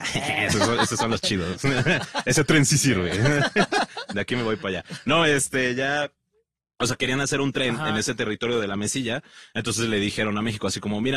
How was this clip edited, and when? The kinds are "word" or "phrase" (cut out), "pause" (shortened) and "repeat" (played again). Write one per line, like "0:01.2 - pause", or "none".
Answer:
none